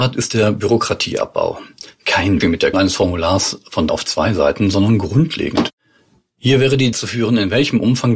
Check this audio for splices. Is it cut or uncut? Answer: cut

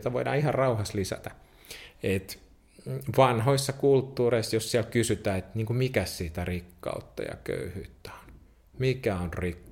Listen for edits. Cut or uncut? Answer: uncut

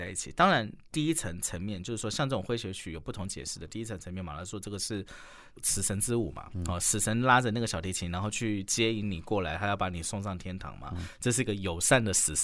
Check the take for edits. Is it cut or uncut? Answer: uncut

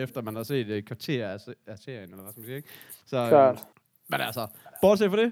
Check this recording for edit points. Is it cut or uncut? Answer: cut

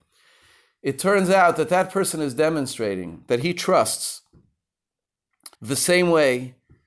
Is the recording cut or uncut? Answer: cut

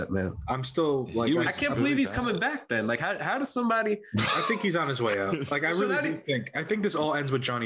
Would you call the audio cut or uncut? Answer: uncut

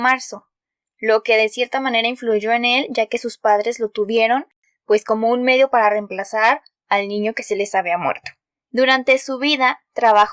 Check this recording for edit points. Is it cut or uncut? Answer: uncut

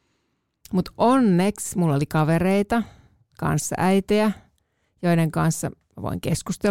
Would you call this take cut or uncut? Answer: uncut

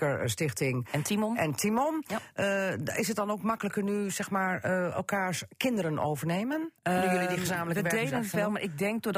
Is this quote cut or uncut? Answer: cut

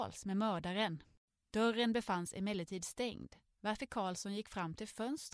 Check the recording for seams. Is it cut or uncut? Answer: uncut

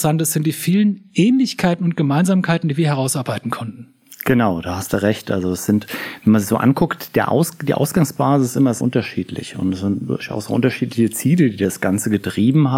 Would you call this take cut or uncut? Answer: cut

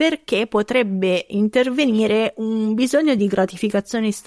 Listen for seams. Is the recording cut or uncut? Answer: uncut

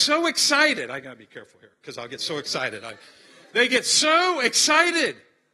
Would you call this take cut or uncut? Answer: uncut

